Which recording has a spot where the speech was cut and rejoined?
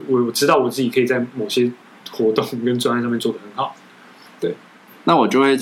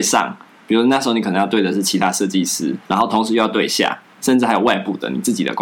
second; 1 cut; at 2.8 s

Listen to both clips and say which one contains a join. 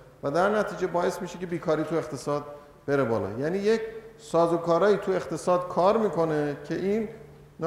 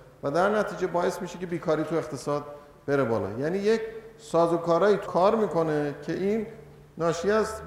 second; 1 cut; at 5.1 s

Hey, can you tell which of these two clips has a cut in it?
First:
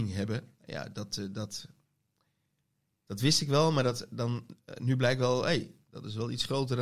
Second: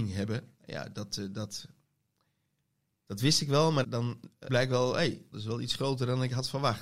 second; 3 cuts; at 3.8 s, 4.5 s, 5.3 s

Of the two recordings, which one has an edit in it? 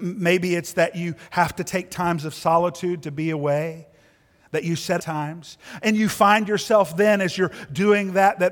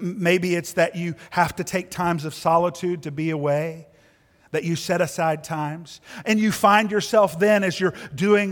first; 1 cut; at 5.0 s

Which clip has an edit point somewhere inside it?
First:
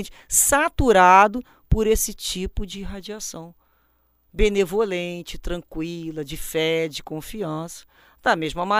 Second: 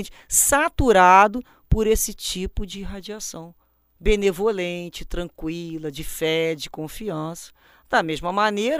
second; 1 cut; at 3.6 s

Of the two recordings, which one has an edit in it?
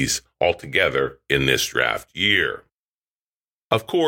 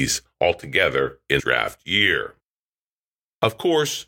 second; 1 cut; at 1.4 s

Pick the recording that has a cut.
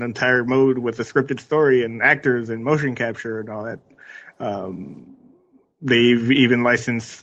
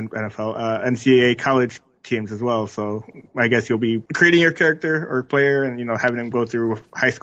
second; 1 cut; at 4.1 s

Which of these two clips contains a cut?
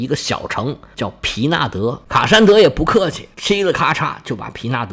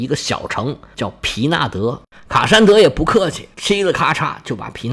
first; 1 cut; at 2.0 s

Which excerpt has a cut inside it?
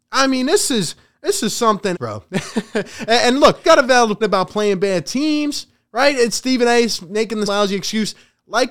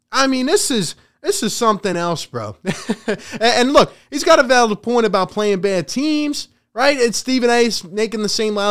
first; 4 cuts; at 1.9 s, 3.6 s, 4.2 s, 7.5 s

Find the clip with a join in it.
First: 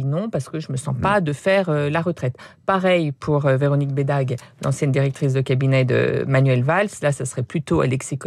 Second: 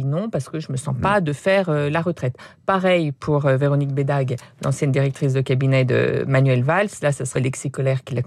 second; 1 cut; at 7.4 s

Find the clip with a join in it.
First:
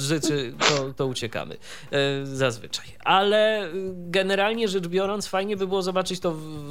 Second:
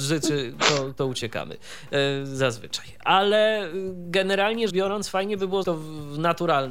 second; 2 cuts; at 4.7 s, 5.6 s

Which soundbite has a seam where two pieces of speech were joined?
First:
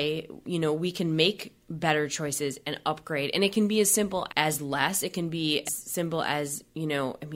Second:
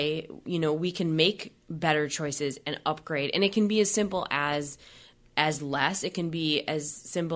first; 2 cuts; at 4.3 s, 5.7 s

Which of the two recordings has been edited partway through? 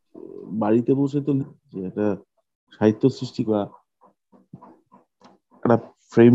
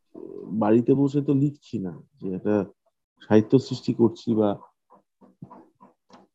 first; 2 cuts; at 1.4 s, 3.5 s

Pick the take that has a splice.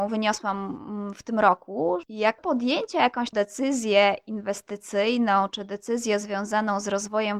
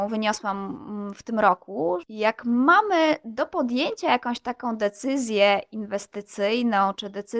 first; 2 cuts; at 2.4 s, 3.3 s

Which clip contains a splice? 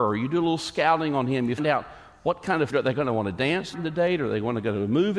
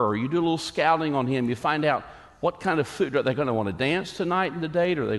first; 3 cuts; at 1.6 s, 2.7 s, 3.7 s

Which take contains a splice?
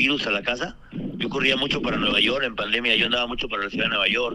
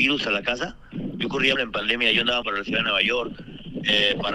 second; 2 cuts; at 1.6 s, 2.4 s

